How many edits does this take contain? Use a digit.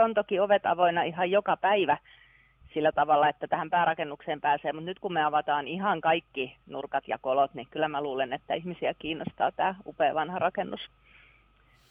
0